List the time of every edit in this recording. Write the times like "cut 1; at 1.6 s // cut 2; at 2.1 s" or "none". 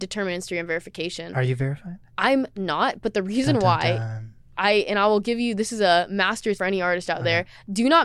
cut 1; at 2.1 s // cut 2; at 6.5 s

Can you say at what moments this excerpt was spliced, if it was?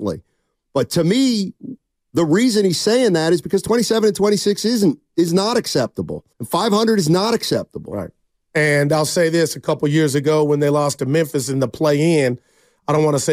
cut 1; at 6.3 s // cut 2; at 8.2 s

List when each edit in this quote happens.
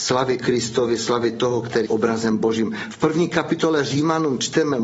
cut 1; at 1.8 s

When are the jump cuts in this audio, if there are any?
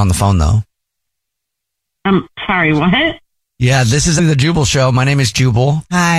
cut 1; at 4.2 s

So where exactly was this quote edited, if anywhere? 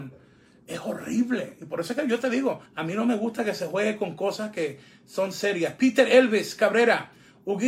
cut 1; at 2.7 s

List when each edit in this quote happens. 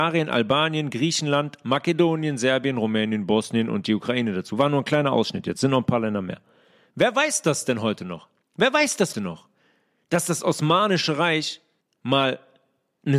cut 1; at 8.4 s // cut 2; at 9.1 s // cut 3; at 11.8 s

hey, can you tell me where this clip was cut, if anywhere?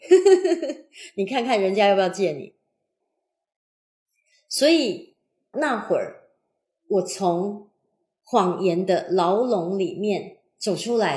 none

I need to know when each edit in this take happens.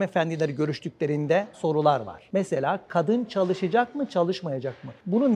cut 1; at 1.5 s

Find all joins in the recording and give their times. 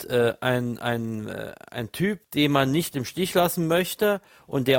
cut 1; at 2.2 s

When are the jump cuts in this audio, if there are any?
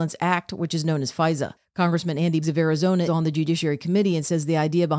cut 1; at 2.4 s // cut 2; at 3.1 s

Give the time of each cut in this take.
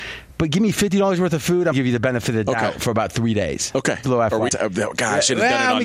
cut 1; at 1.7 s // cut 2; at 4.0 s // cut 3; at 4.5 s

